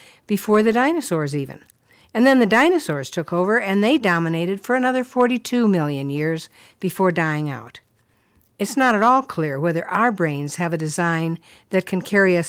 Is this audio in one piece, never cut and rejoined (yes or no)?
yes